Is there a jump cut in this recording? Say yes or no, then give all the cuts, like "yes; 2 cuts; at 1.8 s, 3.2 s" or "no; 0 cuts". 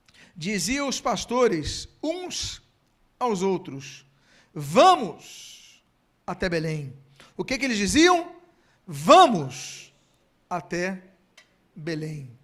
no; 0 cuts